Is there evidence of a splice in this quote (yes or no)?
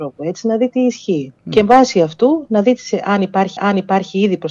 yes